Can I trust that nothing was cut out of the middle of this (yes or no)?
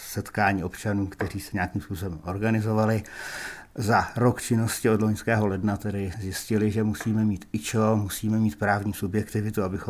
no